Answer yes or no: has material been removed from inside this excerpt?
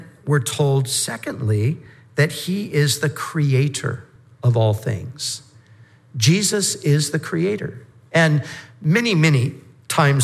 no